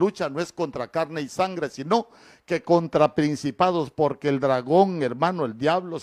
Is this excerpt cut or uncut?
uncut